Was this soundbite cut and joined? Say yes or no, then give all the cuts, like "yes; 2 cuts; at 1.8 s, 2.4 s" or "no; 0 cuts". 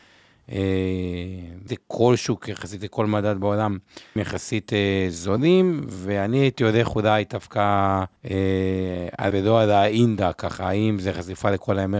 yes; 4 cuts; at 1.7 s, 4.2 s, 8.2 s, 9.3 s